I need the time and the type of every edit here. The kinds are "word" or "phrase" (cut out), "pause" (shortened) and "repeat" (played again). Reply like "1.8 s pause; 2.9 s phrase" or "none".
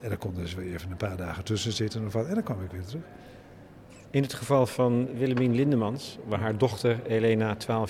none